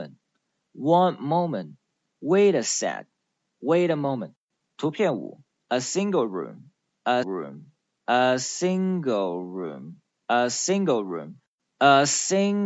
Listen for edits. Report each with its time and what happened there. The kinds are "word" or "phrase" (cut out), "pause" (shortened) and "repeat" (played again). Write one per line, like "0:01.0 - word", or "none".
0:07.2 - word